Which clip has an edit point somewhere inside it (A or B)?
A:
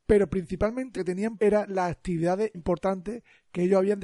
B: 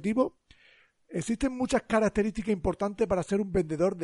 A